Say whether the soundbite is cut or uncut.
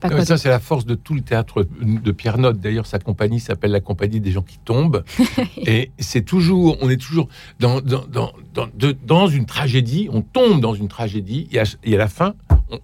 uncut